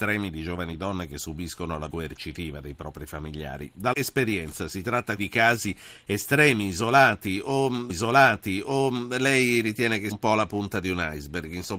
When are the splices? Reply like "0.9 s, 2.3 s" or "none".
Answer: 1.9 s, 3.9 s, 5.2 s, 7.9 s, 10.1 s